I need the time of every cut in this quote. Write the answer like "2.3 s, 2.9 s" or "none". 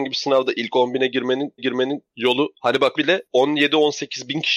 1.6 s, 3.0 s